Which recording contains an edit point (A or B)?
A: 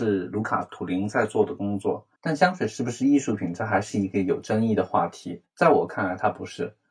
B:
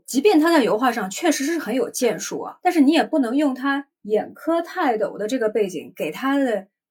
A